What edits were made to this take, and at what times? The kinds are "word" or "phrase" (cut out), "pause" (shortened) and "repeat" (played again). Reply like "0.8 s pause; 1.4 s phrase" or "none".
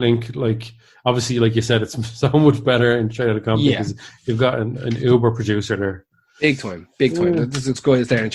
none